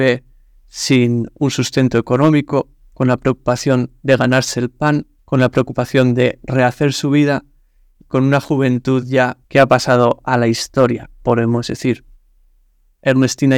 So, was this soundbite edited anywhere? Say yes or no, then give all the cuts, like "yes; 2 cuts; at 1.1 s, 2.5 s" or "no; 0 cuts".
yes; 3 cuts; at 5.2 s, 8.0 s, 9.4 s